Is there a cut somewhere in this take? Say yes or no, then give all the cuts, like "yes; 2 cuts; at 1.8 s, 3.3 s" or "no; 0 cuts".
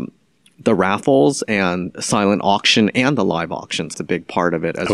yes; 2 cuts; at 1.9 s, 3.9 s